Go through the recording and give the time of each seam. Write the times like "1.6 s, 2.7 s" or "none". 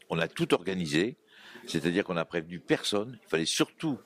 none